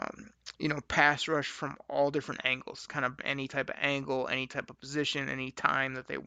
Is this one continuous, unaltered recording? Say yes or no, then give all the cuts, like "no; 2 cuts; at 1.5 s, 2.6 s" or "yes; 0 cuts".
no; 1 cut; at 3.2 s